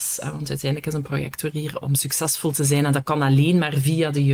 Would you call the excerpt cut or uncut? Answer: cut